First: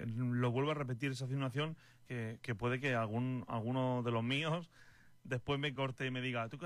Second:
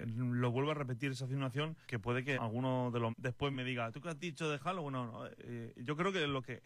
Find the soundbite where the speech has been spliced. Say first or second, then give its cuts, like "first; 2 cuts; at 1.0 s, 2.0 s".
second; 4 cuts; at 1.8 s, 2.3 s, 3.1 s, 3.5 s